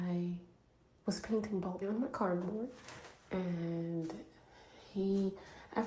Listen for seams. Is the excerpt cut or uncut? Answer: cut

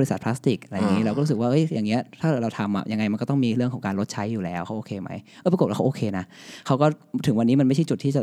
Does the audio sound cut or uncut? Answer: uncut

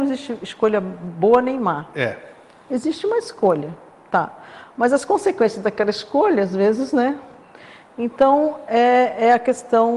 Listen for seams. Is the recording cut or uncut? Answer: uncut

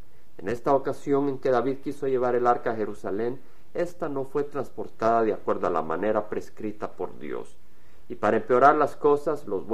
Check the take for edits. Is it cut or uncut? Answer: uncut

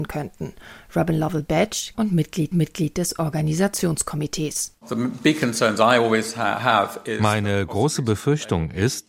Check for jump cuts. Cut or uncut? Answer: cut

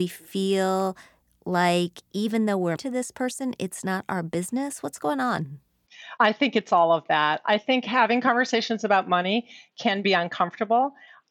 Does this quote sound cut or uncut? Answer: cut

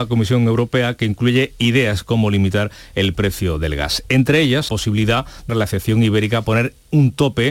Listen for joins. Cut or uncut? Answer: cut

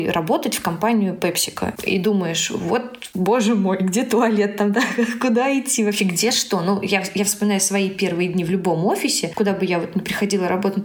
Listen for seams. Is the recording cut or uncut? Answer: cut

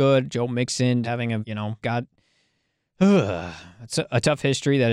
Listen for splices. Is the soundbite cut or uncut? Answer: cut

